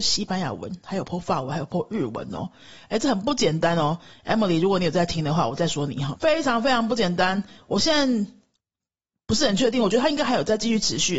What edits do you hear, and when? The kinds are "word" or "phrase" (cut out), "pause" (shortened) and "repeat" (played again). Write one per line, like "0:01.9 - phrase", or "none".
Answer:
0:06.1 - word